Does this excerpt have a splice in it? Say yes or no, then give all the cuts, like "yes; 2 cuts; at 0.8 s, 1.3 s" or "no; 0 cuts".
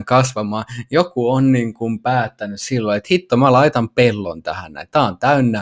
no; 0 cuts